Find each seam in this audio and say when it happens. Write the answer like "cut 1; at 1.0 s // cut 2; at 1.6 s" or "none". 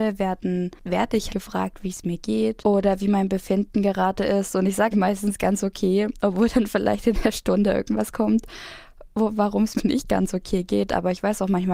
cut 1; at 1.3 s // cut 2; at 4.9 s // cut 3; at 9.8 s